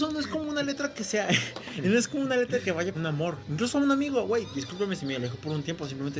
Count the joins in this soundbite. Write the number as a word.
one